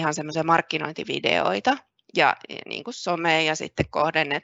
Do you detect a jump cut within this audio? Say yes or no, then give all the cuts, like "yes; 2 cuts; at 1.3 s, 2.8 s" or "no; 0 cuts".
no; 0 cuts